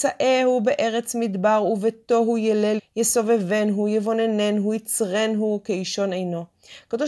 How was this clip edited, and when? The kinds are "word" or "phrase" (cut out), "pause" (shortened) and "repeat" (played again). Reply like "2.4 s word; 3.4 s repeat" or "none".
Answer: 2.8 s word